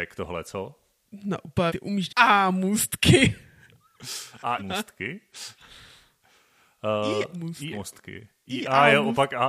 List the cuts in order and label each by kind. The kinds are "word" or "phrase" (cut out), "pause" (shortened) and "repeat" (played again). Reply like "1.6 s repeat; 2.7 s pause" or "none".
1.7 s word; 2.1 s word; 4.6 s word; 7.3 s word; 7.7 s word